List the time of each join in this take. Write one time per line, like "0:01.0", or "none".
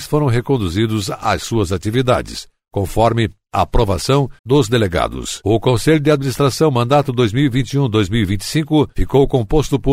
0:04.4

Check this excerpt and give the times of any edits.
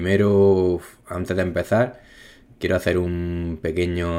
none

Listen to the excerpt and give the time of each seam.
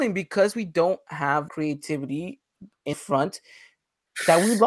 0:01.5
0:02.9

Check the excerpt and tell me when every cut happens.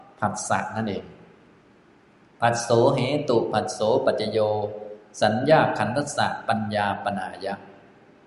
none

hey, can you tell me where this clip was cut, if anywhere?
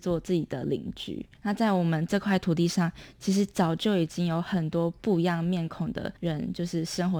0:01.4
0:06.2

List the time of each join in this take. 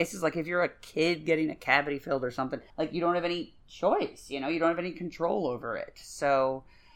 0:02.7

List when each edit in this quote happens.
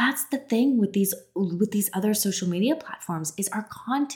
none

